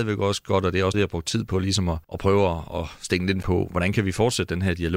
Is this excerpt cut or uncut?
cut